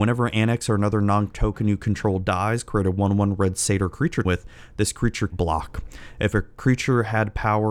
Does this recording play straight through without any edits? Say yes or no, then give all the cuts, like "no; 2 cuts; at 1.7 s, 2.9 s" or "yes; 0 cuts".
no; 3 cuts; at 1.3 s, 4.2 s, 5.3 s